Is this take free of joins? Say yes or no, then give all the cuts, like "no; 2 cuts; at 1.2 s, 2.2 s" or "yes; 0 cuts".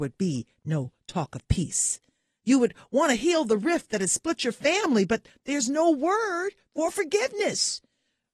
yes; 0 cuts